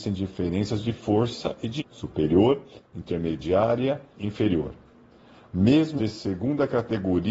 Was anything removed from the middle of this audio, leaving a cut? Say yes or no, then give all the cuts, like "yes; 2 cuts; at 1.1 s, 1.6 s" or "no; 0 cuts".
yes; 3 cuts; at 1.8 s, 4.1 s, 6.0 s